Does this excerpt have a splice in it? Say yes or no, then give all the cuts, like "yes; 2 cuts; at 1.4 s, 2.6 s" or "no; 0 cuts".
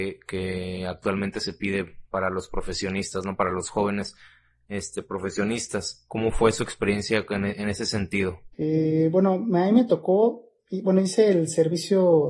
yes; 1 cut; at 8.5 s